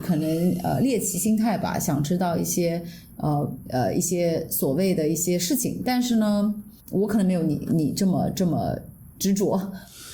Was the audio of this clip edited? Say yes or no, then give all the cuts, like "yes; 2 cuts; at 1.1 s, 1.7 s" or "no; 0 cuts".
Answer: yes; 1 cut; at 6.8 s